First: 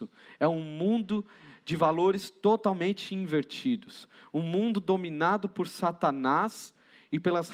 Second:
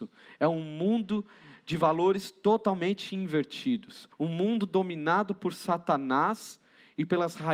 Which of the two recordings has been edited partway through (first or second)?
second